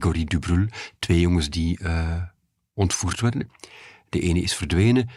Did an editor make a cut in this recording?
no; 0 cuts

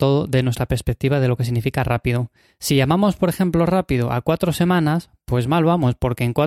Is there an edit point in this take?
no; 0 cuts

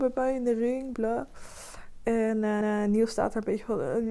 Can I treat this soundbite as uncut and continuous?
no; 2 cuts; at 0.9 s, 2.6 s

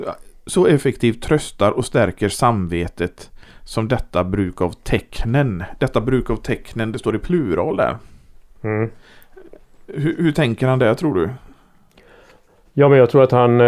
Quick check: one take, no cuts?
yes; 0 cuts

